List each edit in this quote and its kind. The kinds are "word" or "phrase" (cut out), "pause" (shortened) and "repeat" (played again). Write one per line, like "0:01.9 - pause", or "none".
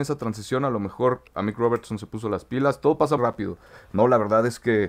0:03.2 - word